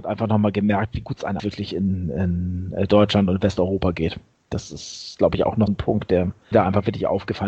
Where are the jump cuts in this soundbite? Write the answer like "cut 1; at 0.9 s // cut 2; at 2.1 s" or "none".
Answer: cut 1; at 1.4 s // cut 2; at 5.7 s // cut 3; at 6.5 s

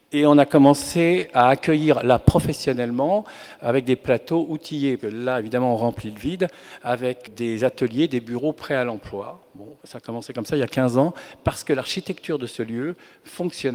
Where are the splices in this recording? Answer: cut 1; at 5.0 s // cut 2; at 7.3 s // cut 3; at 9.8 s

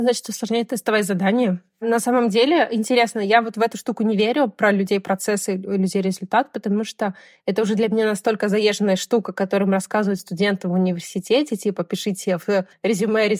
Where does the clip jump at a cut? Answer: cut 1; at 10.2 s

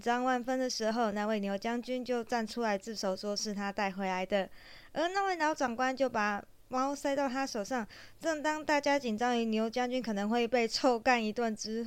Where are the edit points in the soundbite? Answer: none

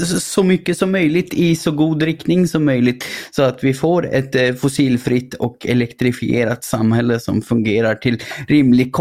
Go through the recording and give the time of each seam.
none

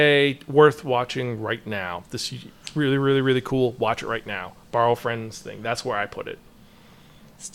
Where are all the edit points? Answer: none

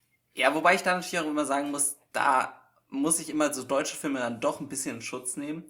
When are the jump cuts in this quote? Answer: none

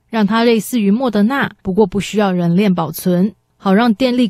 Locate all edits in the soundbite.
cut 1; at 1.6 s

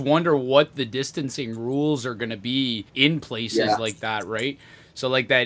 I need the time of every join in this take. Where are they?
cut 1; at 2.9 s

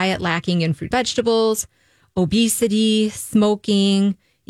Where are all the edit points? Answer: cut 1; at 0.9 s

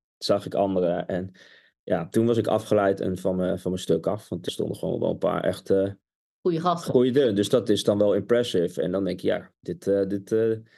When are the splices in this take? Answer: cut 1; at 4.5 s

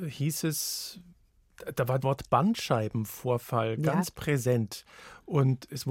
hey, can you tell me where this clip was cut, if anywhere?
cut 1; at 2.0 s

